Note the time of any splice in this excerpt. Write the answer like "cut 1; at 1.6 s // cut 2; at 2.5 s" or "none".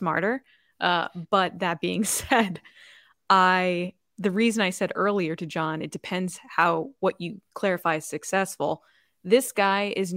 none